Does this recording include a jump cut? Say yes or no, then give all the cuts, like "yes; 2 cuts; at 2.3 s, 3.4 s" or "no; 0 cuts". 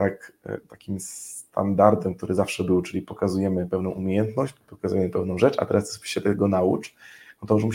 no; 0 cuts